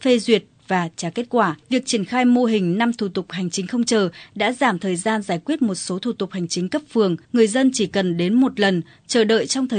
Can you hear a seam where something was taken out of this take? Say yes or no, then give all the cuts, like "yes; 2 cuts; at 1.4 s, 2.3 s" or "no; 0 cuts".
yes; 2 cuts; at 1.6 s, 7.2 s